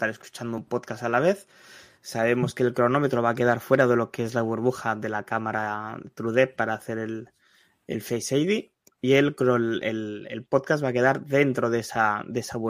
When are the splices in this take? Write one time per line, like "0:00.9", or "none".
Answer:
none